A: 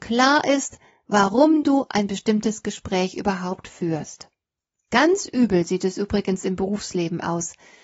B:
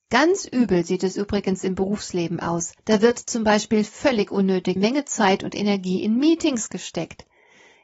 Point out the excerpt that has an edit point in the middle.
B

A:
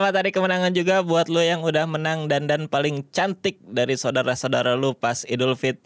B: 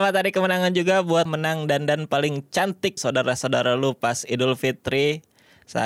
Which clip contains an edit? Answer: B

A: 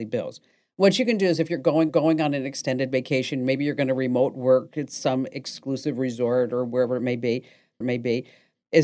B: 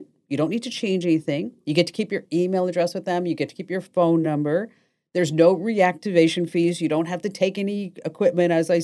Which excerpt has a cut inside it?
A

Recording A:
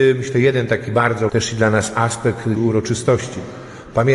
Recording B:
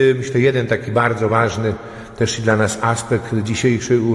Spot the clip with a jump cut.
A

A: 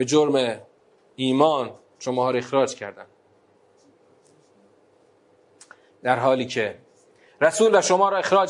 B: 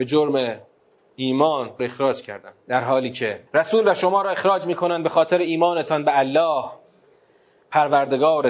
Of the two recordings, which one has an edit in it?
B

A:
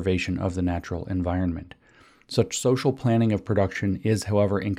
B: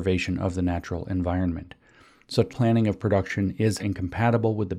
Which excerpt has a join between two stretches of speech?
B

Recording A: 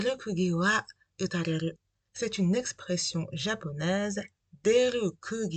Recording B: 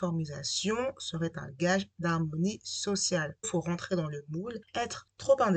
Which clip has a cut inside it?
B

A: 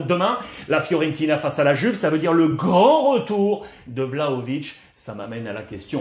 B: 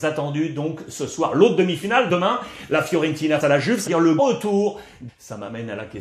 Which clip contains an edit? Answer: B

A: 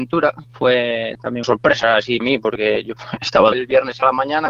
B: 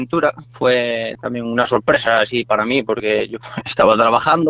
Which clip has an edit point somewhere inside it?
A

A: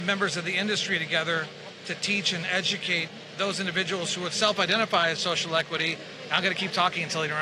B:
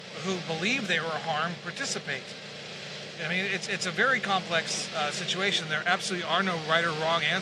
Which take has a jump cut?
A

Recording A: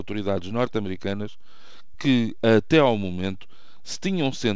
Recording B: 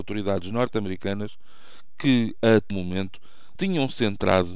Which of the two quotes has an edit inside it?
B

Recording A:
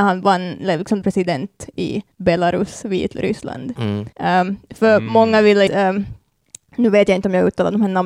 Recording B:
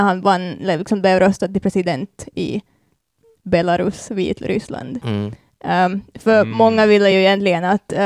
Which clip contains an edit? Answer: A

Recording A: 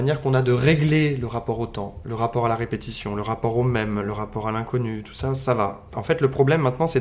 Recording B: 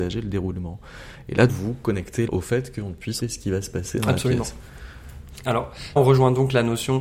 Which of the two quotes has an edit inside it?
B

